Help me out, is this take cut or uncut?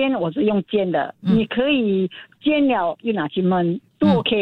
uncut